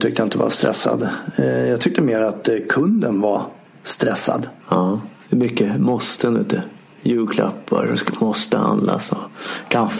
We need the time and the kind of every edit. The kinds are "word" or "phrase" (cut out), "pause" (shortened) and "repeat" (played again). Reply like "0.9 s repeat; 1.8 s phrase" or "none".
4.6 s pause